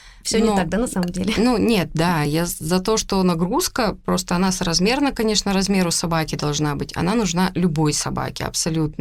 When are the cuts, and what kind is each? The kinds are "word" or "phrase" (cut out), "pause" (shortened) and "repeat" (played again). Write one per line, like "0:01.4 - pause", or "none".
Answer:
none